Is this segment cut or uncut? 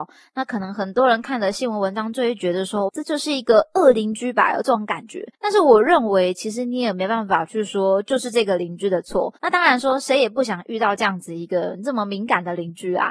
cut